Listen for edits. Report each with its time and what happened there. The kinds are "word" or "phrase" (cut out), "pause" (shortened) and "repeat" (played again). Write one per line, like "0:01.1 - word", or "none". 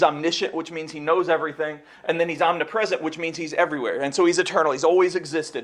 none